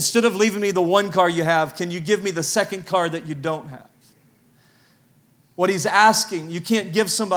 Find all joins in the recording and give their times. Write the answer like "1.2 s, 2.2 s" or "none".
none